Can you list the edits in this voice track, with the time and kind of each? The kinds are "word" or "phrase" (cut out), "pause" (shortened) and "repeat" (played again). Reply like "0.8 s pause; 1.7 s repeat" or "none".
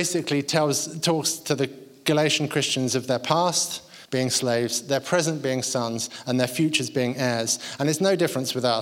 4.0 s pause